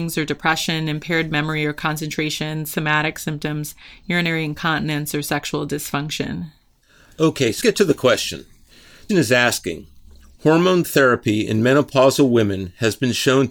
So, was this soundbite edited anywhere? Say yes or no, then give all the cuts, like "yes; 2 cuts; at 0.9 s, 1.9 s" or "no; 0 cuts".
yes; 2 cuts; at 7.6 s, 9.1 s